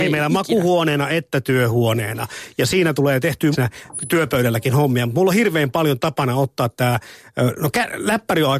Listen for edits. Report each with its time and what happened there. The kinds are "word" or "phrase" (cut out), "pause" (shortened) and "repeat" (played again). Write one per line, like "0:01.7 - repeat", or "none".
0:03.5 - word